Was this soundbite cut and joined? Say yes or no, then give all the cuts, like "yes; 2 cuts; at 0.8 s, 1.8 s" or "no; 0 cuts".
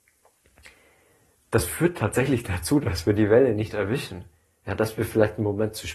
no; 0 cuts